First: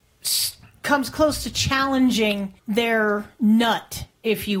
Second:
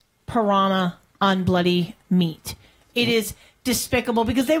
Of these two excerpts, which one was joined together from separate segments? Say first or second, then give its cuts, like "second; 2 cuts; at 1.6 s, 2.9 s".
first; 1 cut; at 2.6 s